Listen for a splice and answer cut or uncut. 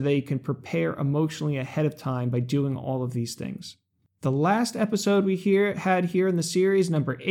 uncut